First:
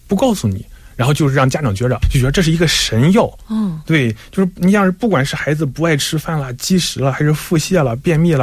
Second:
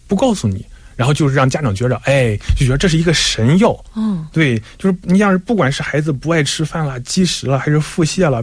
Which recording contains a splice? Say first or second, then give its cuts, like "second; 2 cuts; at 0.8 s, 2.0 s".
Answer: first; 1 cut; at 2.0 s